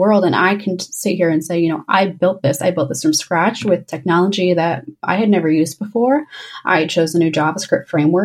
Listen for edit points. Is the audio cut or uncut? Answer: uncut